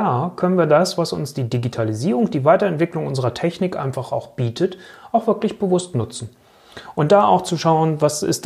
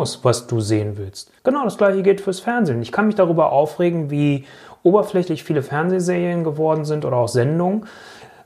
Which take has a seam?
second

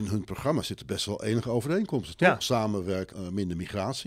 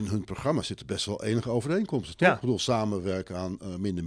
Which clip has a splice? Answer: first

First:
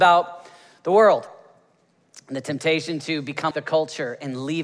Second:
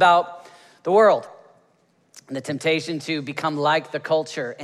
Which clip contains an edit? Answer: first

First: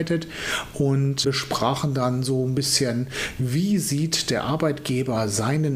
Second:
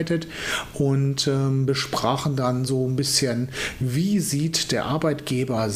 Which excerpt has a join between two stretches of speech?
first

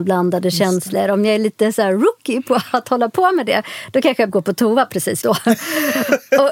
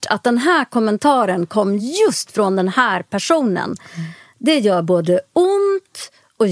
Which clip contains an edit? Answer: first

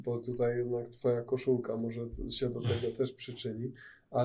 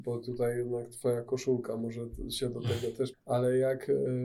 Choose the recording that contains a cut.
second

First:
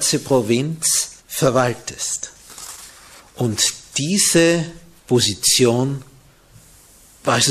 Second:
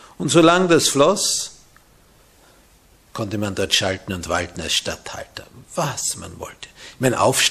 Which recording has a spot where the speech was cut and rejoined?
first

